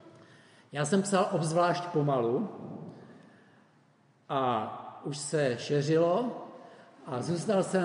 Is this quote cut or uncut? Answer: uncut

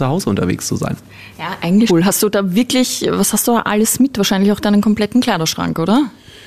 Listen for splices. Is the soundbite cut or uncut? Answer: cut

